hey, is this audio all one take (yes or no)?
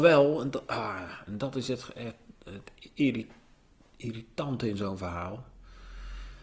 yes